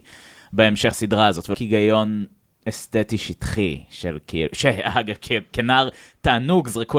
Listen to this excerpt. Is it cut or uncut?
cut